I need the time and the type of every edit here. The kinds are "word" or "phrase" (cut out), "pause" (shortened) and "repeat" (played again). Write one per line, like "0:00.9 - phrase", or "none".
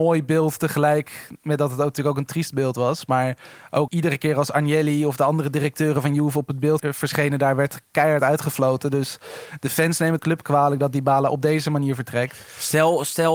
0:03.9 - phrase
0:06.8 - word
0:10.2 - phrase